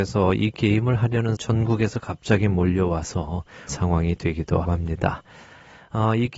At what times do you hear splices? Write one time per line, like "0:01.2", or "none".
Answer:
0:01.4
0:03.7
0:04.6